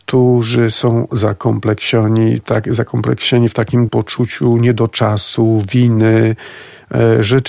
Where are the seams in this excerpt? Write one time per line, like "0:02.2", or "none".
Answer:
0:01.1
0:03.9

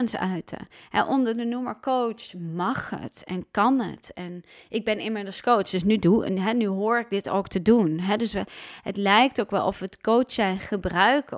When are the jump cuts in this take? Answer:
none

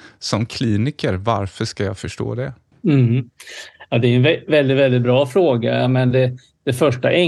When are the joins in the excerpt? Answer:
0:02.7

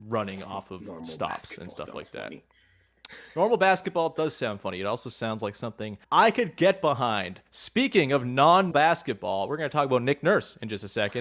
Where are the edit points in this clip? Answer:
0:06.0
0:07.5
0:08.7

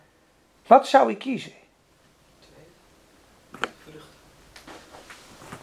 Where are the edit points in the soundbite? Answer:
0:03.7

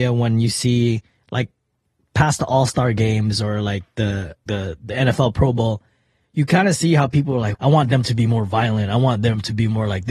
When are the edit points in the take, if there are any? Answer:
0:04.5
0:07.5

